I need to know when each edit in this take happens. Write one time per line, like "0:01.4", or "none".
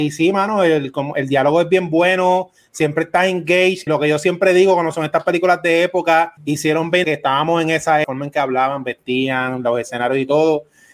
0:03.9
0:06.4
0:07.0
0:08.0

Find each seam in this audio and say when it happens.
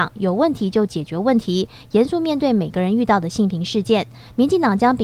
none

